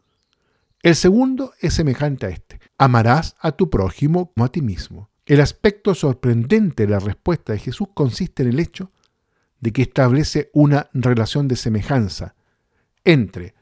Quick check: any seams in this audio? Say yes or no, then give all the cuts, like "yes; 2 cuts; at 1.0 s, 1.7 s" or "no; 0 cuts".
yes; 3 cuts; at 2.7 s, 4.4 s, 5.2 s